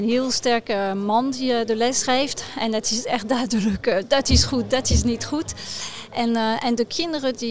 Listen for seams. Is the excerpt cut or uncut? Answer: uncut